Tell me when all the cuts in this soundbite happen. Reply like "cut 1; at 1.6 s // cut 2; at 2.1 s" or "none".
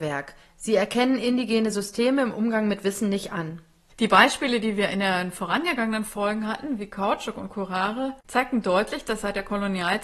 none